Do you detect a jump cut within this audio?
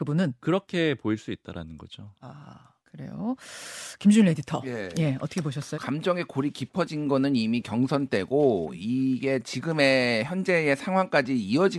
yes; 2 cuts; at 2.8 s, 5.7 s

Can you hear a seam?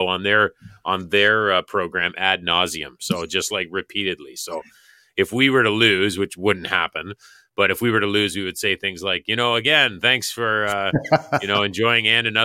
no; 0 cuts

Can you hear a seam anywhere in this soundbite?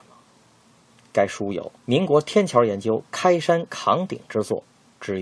yes; 1 cut; at 1.8 s

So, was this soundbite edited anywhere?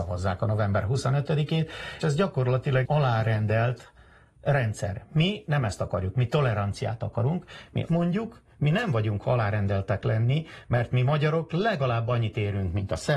yes; 4 cuts; at 2.0 s, 2.8 s, 7.9 s, 9.2 s

